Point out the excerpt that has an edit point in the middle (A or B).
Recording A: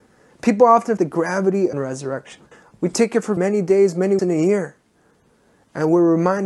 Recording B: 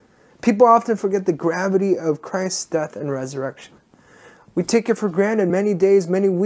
A